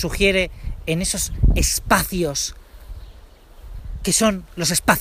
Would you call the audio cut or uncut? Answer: uncut